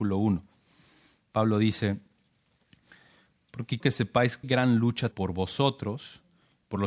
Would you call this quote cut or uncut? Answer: cut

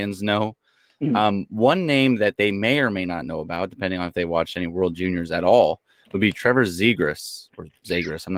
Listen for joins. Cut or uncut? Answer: uncut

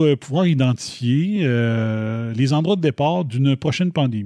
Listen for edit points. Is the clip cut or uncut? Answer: uncut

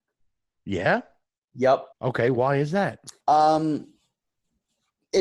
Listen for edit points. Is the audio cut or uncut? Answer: cut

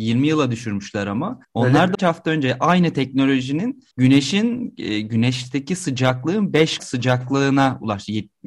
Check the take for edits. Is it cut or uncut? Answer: cut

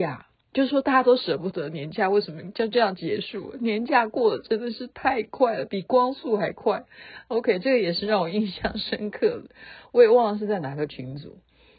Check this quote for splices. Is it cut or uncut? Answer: uncut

